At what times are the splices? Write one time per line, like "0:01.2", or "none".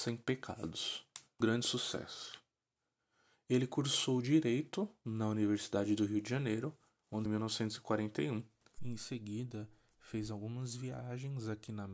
0:01.4
0:07.3